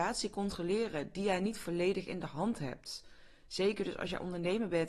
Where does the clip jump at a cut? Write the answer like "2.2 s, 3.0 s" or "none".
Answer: none